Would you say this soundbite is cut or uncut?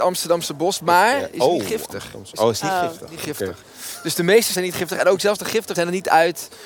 cut